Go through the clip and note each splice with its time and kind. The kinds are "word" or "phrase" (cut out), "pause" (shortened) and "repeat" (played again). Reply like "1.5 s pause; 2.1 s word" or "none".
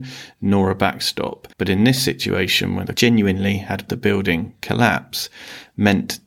1.5 s pause; 2.9 s word; 3.9 s phrase